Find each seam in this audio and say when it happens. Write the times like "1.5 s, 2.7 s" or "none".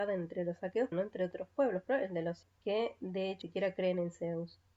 0.9 s, 1.9 s, 2.4 s, 3.4 s

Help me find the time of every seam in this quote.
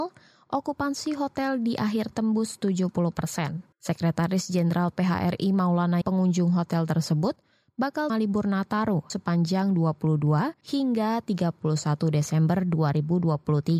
2.1 s, 3.7 s, 6.0 s, 8.1 s, 9.1 s, 10.6 s

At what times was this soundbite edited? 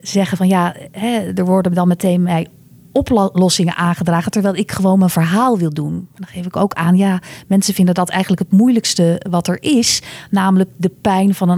none

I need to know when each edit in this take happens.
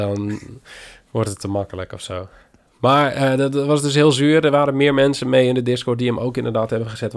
none

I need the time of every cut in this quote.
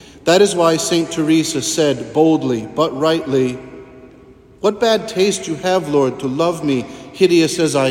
none

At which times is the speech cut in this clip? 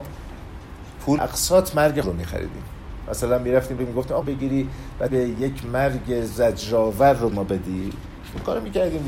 1.2 s, 2.0 s, 3.8 s, 4.2 s, 5.1 s, 7.3 s

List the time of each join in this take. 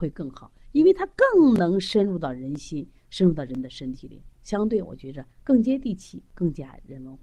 4.3 s

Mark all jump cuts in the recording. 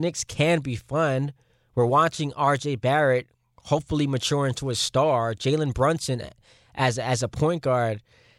none

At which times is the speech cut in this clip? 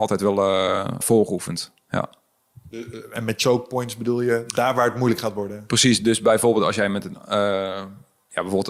1.0 s

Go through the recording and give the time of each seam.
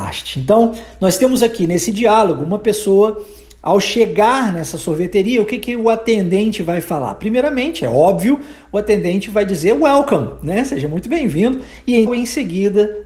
12.1 s

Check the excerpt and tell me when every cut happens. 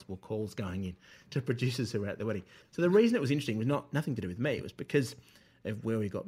none

